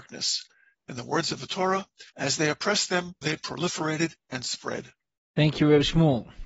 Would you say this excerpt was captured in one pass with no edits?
no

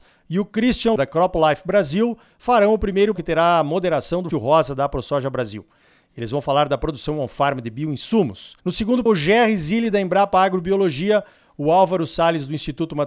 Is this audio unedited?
no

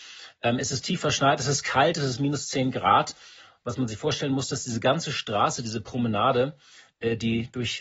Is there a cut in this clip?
no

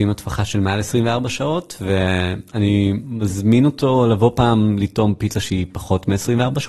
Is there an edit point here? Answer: no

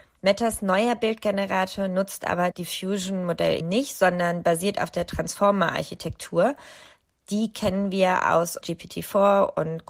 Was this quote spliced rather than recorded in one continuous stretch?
yes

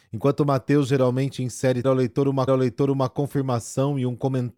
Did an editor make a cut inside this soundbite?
yes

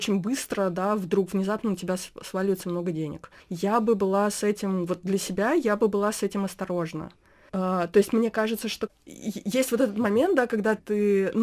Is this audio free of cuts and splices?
yes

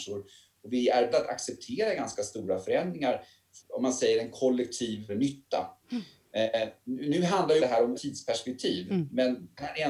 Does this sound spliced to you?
yes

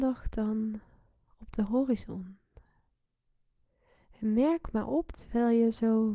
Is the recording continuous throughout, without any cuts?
yes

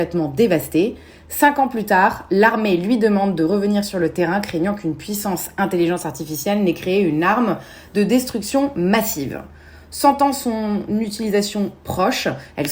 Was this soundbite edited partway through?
no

